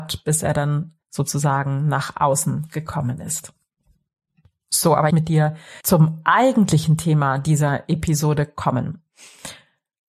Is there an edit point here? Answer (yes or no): yes